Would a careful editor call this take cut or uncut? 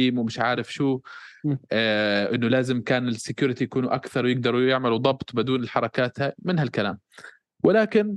uncut